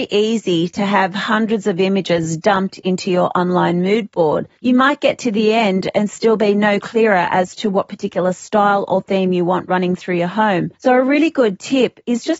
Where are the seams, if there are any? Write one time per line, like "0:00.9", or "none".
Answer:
0:04.6
0:10.8